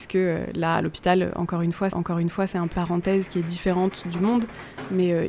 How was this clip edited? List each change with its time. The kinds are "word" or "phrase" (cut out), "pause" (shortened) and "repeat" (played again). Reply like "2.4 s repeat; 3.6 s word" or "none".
1.9 s repeat; 2.7 s word